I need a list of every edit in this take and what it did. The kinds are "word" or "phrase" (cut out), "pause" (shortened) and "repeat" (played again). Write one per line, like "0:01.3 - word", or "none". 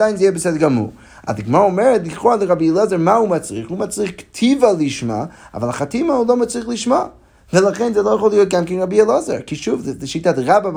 none

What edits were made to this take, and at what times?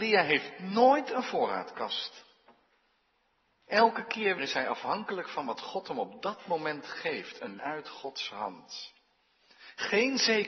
0:04.4 - word
0:07.6 - word

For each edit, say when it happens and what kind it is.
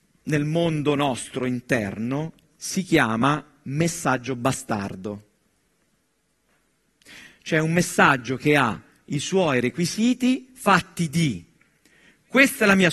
none

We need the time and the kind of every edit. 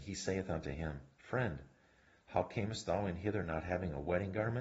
none

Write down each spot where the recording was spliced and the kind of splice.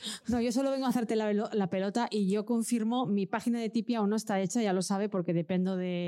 none

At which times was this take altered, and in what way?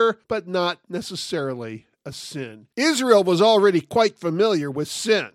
none

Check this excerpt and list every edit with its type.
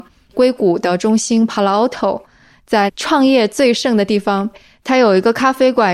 none

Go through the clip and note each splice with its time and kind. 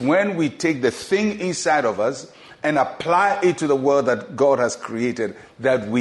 none

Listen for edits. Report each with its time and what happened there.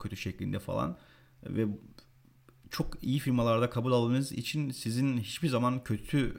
none

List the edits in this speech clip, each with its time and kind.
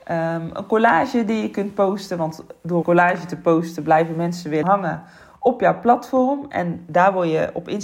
0:02.8 - word
0:04.6 - word

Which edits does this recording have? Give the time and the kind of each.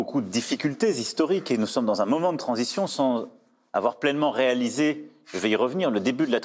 none

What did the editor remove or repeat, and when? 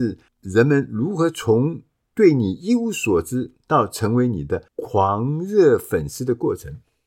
0:02.0 - pause
0:04.7 - pause

